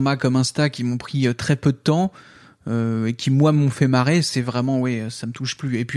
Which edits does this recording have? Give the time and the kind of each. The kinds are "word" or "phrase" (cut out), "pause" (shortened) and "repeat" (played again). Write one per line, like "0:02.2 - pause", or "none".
none